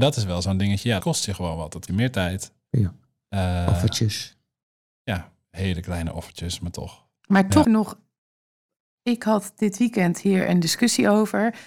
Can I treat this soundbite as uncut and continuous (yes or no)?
no